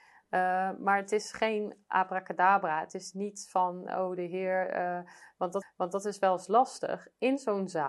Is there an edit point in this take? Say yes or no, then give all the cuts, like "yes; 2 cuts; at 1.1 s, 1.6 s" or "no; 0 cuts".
yes; 1 cut; at 5.6 s